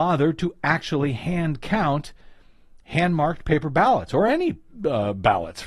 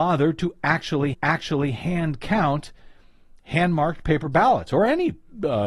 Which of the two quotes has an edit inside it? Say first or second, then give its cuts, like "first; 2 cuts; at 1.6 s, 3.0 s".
second; 1 cut; at 1.1 s